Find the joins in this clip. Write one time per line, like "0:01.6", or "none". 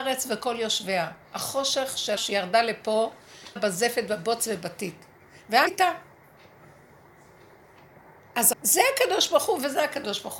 0:02.2
0:03.6
0:05.7
0:08.5